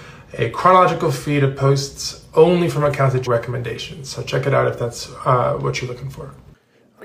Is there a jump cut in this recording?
yes; 1 cut; at 3.3 s

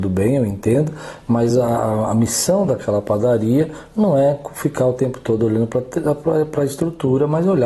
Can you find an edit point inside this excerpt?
no; 0 cuts

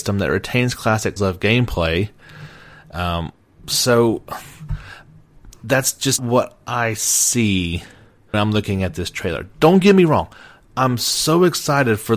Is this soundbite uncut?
no; 3 cuts; at 1.2 s, 6.2 s, 8.3 s

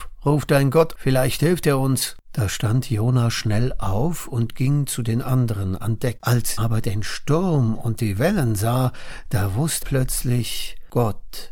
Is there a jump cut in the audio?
yes; 3 cuts; at 1.0 s, 6.6 s, 9.8 s

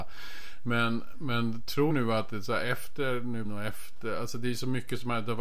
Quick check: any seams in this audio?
yes; 2 cuts; at 1.9 s, 3.4 s

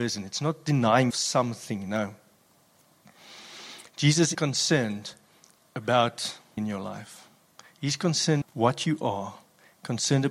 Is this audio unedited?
no; 4 cuts; at 1.1 s, 4.3 s, 6.6 s, 8.4 s

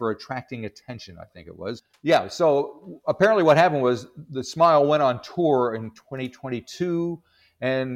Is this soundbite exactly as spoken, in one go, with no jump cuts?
yes; 0 cuts

